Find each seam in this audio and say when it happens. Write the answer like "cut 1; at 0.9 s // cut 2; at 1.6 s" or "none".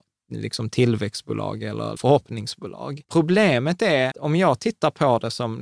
cut 1; at 2.0 s // cut 2; at 3.0 s // cut 3; at 4.1 s